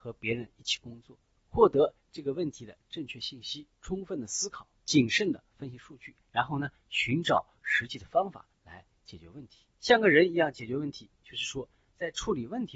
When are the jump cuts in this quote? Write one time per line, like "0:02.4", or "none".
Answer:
0:01.4
0:03.7
0:04.8
0:06.2
0:09.7